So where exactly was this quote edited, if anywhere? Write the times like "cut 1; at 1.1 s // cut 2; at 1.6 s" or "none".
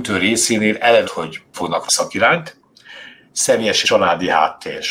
cut 1; at 1.0 s // cut 2; at 1.5 s // cut 3; at 1.9 s // cut 4; at 3.8 s